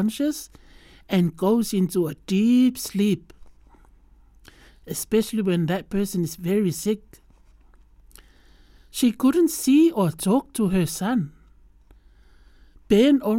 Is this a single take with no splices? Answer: yes; 0 cuts

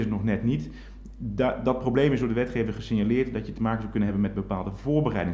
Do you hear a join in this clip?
no; 0 cuts

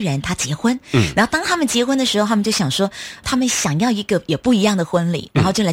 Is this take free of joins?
no; 1 cut; at 3.2 s

